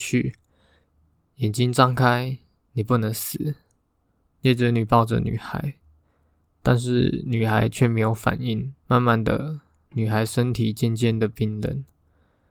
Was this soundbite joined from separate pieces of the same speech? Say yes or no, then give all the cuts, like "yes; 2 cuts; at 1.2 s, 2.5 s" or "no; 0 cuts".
yes; 1 cut; at 8.8 s